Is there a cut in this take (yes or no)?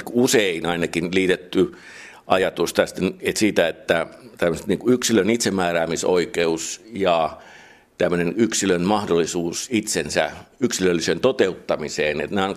no